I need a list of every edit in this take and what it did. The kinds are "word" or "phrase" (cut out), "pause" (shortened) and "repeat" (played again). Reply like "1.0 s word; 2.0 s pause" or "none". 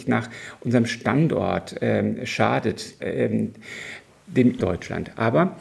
3.0 s word; 4.6 s word